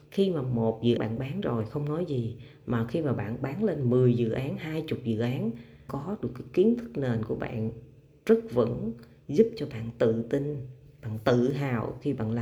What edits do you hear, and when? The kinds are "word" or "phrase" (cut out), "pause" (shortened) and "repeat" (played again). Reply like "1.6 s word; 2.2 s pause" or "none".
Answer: 1.0 s word; 5.9 s word

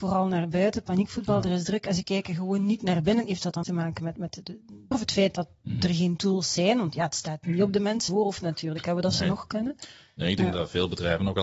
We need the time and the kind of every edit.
3.6 s word; 4.4 s word; 4.9 s word; 8.1 s word

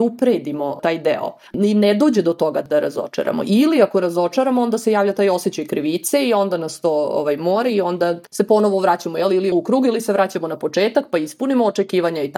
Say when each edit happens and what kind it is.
8.3 s pause; 9.5 s word

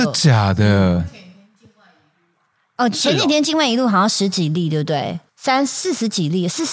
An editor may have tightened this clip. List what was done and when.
5.3 s pause

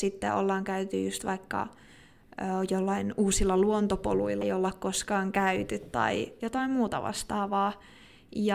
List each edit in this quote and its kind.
4.4 s word

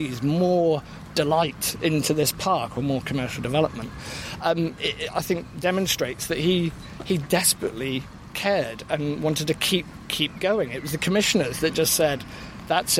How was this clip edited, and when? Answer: none

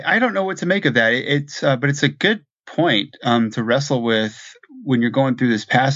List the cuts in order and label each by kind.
none

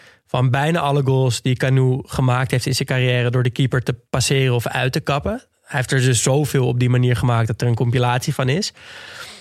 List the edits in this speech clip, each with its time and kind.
none

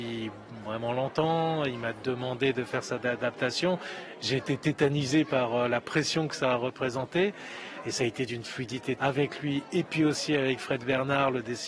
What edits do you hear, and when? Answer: 9.0 s word

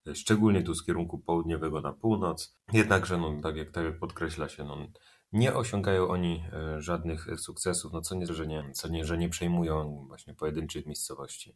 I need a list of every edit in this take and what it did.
7.4 s word; 8.3 s word

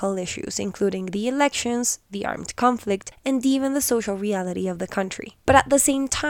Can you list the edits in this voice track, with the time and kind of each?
5.4 s pause

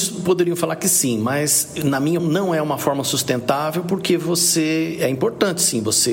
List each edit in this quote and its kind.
2.2 s word

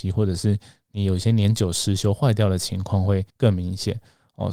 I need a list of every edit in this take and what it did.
3.3 s pause

